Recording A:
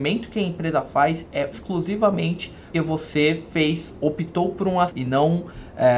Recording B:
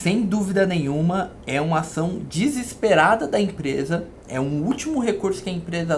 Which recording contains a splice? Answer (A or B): A